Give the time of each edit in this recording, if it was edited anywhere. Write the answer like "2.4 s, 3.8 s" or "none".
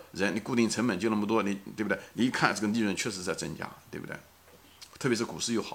none